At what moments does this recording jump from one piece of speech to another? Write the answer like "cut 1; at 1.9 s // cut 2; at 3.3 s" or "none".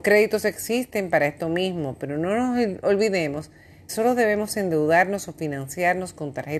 cut 1; at 3.9 s